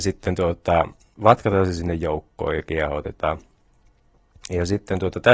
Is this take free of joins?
yes; 0 cuts

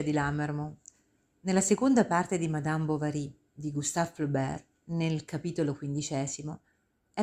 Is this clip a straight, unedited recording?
no; 1 cut; at 4.7 s

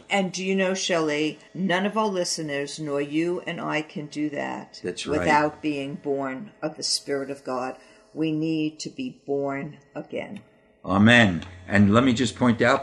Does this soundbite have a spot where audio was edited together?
yes; 1 cut; at 1.5 s

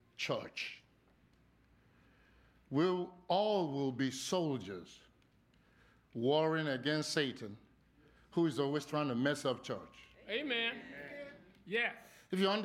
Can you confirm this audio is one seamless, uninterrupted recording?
yes; 0 cuts

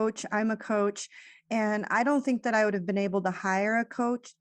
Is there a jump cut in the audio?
no; 0 cuts

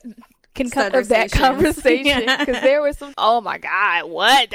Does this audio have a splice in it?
yes; 2 cuts; at 0.9 s, 3.1 s

